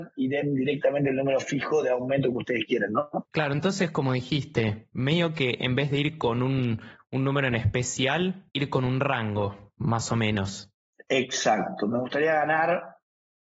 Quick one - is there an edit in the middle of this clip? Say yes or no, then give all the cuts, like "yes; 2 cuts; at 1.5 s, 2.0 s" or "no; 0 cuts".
yes; 3 cuts; at 3.2 s, 8.5 s, 10.9 s